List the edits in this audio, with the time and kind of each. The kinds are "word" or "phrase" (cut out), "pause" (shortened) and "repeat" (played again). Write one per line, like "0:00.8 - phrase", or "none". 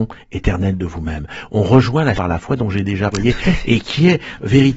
0:02.2 - word
0:03.1 - word